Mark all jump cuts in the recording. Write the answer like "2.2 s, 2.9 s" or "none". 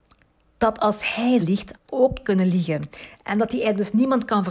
1.4 s, 1.8 s, 2.2 s